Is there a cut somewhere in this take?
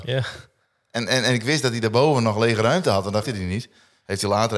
yes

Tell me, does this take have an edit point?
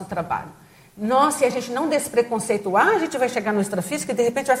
no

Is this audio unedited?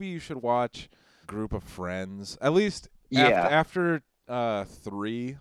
no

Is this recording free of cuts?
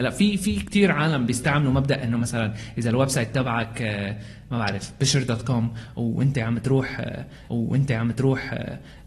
no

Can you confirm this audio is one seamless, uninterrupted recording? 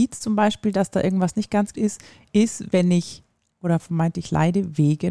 no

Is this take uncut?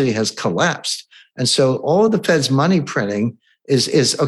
yes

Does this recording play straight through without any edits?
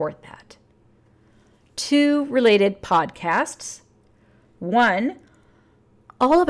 yes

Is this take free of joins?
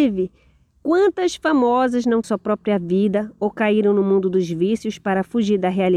no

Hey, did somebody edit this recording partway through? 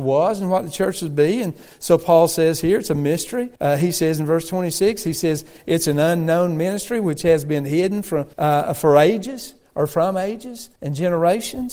yes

